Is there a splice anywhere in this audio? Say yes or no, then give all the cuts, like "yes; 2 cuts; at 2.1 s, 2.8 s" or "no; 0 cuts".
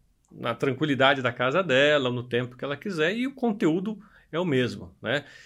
no; 0 cuts